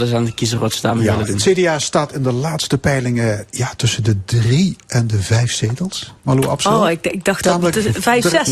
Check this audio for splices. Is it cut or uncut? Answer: uncut